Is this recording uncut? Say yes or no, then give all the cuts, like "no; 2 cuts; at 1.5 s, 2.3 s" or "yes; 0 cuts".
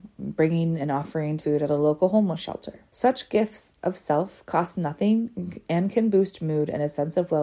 no; 2 cuts; at 1.4 s, 2.9 s